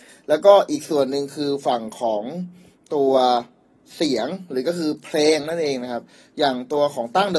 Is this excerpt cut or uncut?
uncut